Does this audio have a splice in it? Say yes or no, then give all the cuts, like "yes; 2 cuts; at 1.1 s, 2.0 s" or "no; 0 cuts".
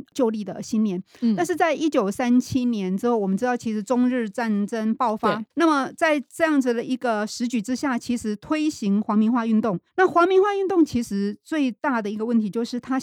yes; 2 cuts; at 5.5 s, 9.9 s